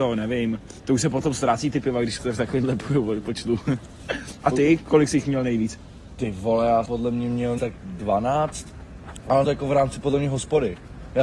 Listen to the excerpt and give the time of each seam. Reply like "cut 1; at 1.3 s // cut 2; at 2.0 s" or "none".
cut 1; at 2.2 s // cut 2; at 6.9 s // cut 3; at 7.6 s // cut 4; at 9.4 s